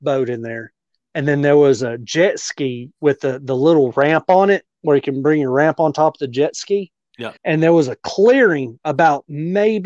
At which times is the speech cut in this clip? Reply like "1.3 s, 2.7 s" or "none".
7.4 s

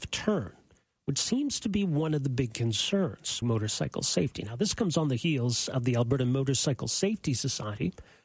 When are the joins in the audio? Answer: 3.4 s

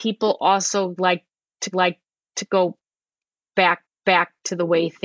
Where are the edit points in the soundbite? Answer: 1.7 s, 3.9 s

